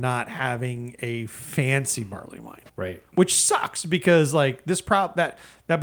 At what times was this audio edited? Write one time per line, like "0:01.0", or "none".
0:02.7